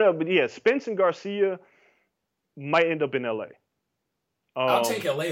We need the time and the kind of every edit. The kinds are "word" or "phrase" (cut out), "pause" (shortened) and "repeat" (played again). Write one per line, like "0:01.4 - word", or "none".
none